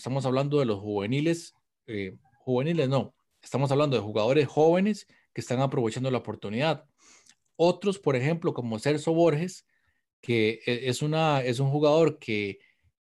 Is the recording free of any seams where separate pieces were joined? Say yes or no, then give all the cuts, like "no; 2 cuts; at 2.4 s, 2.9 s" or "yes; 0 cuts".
yes; 0 cuts